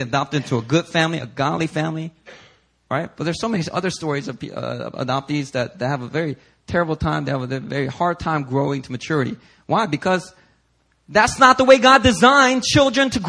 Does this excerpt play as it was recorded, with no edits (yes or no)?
yes